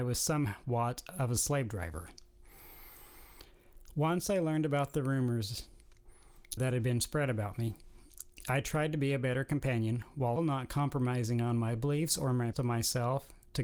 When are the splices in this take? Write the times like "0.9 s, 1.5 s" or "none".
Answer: 6.6 s, 10.4 s, 12.5 s

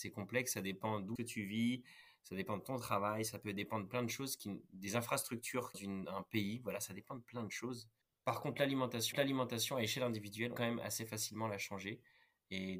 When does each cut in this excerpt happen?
1.2 s, 5.7 s, 8.0 s, 9.1 s, 10.6 s

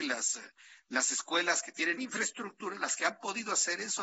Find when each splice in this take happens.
2.0 s

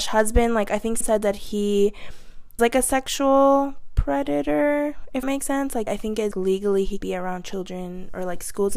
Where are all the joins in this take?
1.0 s, 2.6 s, 5.2 s, 5.9 s, 6.3 s, 7.0 s

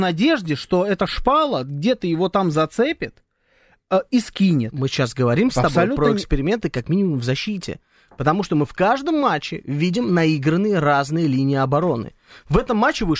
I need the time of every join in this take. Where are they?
none

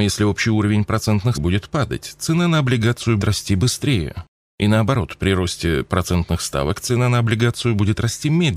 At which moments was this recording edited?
1.3 s, 3.2 s

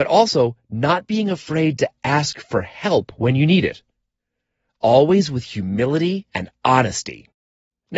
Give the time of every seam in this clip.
none

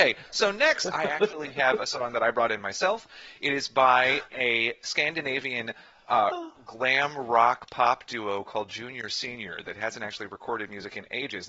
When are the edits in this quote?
none

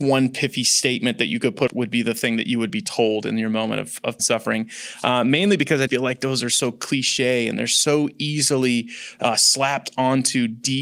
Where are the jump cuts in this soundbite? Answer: 1.7 s, 4.2 s, 5.9 s

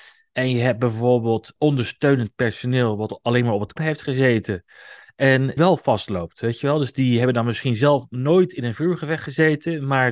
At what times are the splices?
1.6 s, 3.8 s, 5.6 s

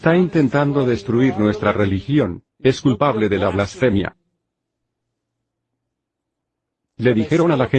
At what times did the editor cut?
2.5 s

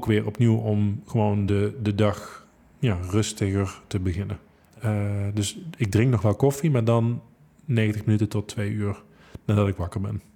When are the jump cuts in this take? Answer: none

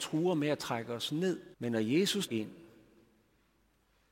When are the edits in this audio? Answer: 1.5 s, 2.3 s

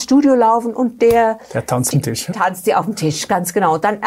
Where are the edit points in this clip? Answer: 1.9 s, 2.3 s

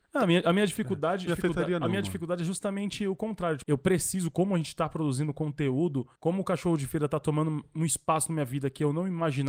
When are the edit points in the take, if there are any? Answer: 1.3 s, 3.6 s, 6.2 s

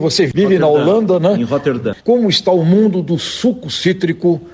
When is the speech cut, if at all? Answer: 2.0 s

